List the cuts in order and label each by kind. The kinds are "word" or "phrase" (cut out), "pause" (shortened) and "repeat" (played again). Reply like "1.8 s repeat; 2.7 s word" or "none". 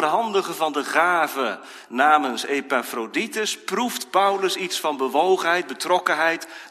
none